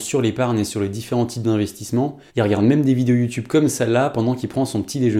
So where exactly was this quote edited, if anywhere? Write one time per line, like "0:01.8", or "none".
0:02.3